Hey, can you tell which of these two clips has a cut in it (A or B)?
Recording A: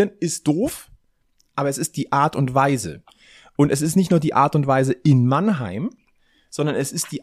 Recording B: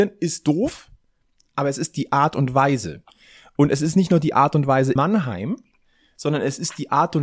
B